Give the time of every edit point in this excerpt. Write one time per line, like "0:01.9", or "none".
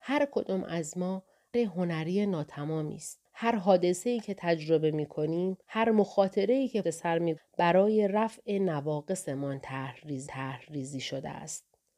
0:01.5
0:03.2
0:05.6
0:06.8
0:07.4
0:10.3